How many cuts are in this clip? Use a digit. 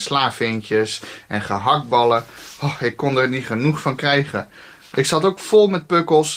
0